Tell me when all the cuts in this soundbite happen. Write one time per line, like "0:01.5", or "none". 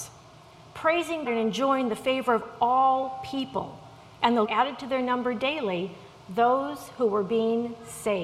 0:01.3
0:04.4